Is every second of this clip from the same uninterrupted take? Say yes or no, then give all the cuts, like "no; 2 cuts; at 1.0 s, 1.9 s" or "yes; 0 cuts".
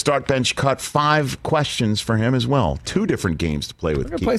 yes; 0 cuts